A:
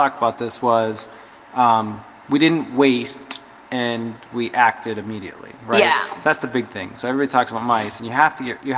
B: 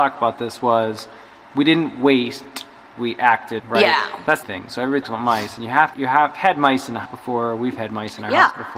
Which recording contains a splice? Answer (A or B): B